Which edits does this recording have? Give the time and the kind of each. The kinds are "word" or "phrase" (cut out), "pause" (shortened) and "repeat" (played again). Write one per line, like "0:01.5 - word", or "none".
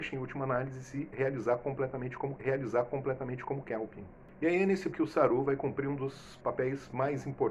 0:02.4 - repeat
0:04.9 - word